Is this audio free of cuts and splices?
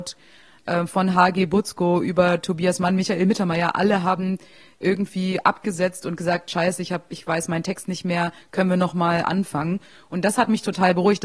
yes; 0 cuts

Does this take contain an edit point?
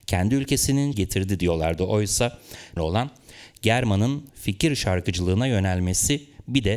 yes; 2 cuts; at 0.9 s, 2.8 s

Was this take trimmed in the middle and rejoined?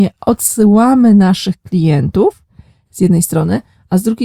no; 0 cuts

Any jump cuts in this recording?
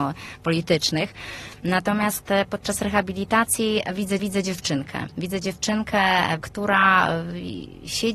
yes; 2 cuts; at 4.2 s, 6.4 s

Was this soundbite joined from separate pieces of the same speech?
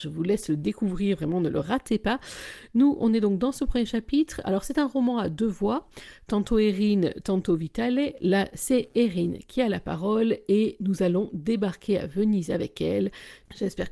no; 0 cuts

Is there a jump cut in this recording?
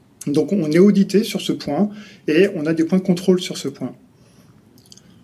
no; 0 cuts

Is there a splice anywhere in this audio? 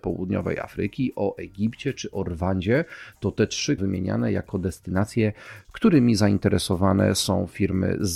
yes; 1 cut; at 3.8 s

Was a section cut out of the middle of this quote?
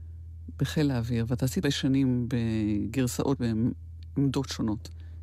yes; 2 cuts; at 1.6 s, 3.4 s

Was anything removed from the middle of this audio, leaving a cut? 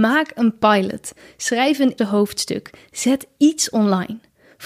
yes; 1 cut; at 2.0 s

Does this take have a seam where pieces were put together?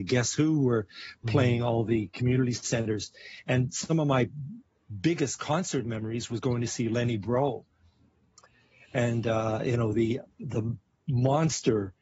no; 0 cuts

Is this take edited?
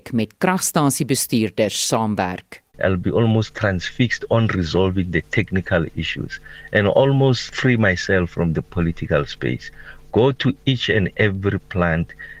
yes; 1 cut; at 2.7 s

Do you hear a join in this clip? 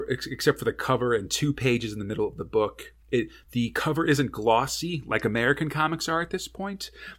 yes; 1 cut; at 3.0 s

